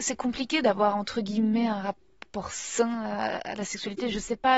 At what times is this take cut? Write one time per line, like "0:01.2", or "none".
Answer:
none